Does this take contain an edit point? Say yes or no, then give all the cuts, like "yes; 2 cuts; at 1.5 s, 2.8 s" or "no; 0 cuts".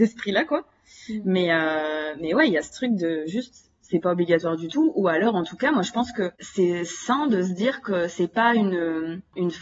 yes; 1 cut; at 6.3 s